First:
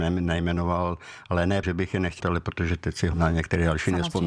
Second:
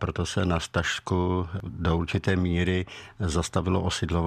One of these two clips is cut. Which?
first; 3 cuts; at 1.6 s, 2.2 s, 3.1 s

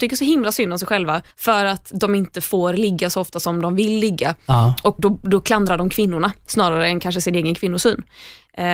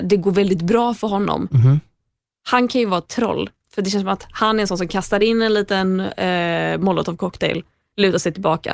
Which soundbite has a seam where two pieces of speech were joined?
first; 2 cuts; at 1.3 s, 5.0 s

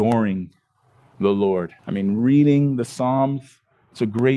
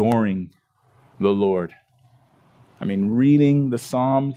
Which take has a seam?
first; 1 cut; at 1.8 s

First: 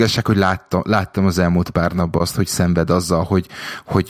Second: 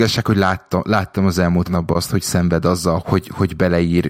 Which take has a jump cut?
second; 2 cuts; at 1.6 s, 3.0 s

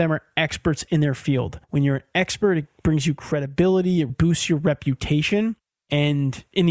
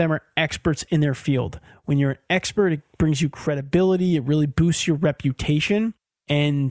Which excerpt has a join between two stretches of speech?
first; 2 cuts; at 1.6 s, 4.1 s

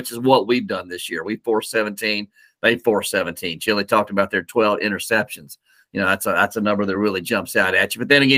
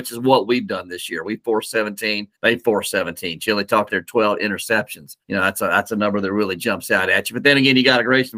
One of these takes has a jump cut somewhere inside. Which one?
second; 3 cuts; at 2.3 s, 3.9 s, 5.2 s

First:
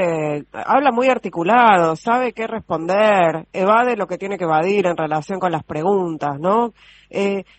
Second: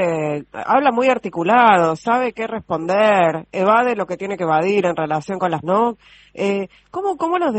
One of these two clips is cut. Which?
second; 1 cut; at 5.6 s

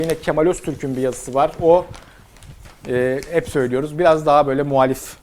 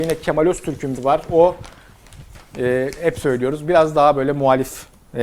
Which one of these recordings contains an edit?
second; 1 cut; at 1.0 s

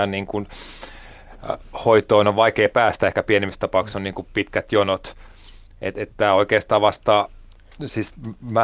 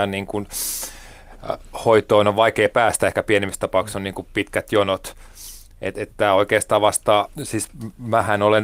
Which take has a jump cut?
second; 1 cut; at 7.3 s

